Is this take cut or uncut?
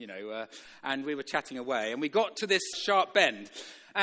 cut